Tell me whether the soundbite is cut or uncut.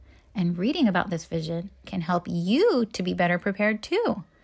uncut